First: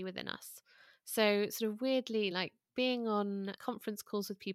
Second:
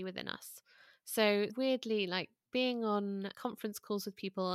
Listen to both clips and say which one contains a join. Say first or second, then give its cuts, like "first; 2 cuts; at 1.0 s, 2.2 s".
second; 1 cut; at 1.5 s